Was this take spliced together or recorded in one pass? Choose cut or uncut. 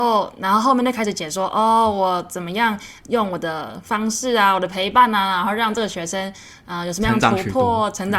uncut